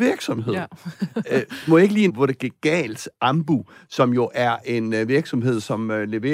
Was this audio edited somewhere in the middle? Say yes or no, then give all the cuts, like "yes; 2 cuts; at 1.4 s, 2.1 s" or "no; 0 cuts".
yes; 1 cut; at 2.1 s